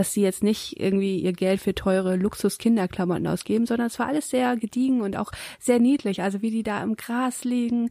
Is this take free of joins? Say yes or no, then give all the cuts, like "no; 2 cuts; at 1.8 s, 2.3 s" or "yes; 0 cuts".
yes; 0 cuts